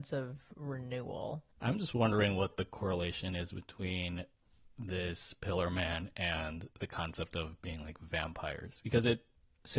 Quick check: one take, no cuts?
no; 2 cuts; at 1.5 s, 6.7 s

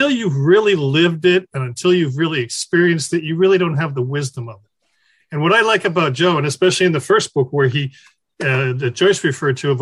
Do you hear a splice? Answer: no; 0 cuts

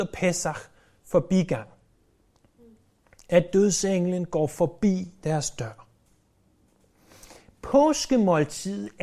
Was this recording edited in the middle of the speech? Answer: no; 0 cuts

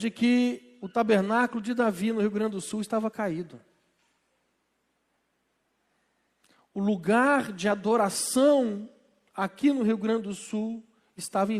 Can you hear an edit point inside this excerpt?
no; 0 cuts

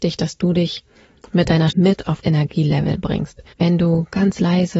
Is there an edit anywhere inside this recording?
yes; 3 cuts; at 1.7 s, 2.2 s, 3.5 s

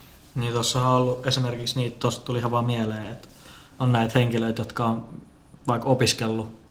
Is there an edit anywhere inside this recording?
yes; 1 cut; at 3.8 s

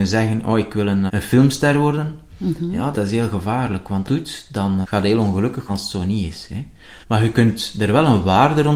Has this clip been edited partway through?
yes; 6 cuts; at 1.1 s, 2.9 s, 4.1 s, 4.8 s, 5.7 s, 7.0 s

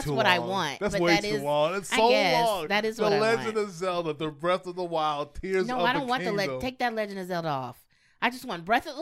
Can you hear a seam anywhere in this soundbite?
no; 0 cuts

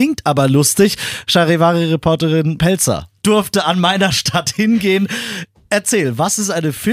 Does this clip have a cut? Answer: yes; 2 cuts; at 2.6 s, 3.2 s

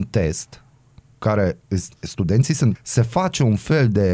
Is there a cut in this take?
yes; 1 cut; at 2.7 s

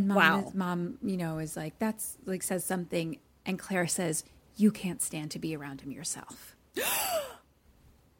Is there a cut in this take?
no; 0 cuts

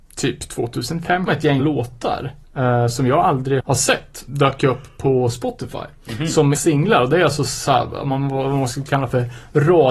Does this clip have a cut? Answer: yes; 5 cuts; at 1.3 s, 1.6 s, 3.6 s, 4.3 s, 6.5 s

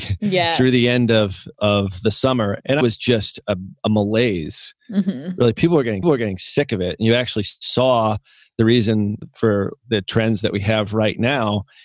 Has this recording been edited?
yes; 2 cuts; at 2.8 s, 6.0 s

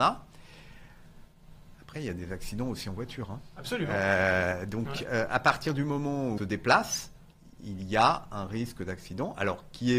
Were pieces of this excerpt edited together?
yes; 1 cut; at 6.4 s

